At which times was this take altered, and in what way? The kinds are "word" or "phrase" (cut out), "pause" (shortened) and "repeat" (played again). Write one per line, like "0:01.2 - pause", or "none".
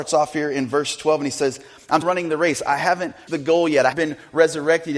0:02.0 - word
0:03.3 - word
0:03.9 - word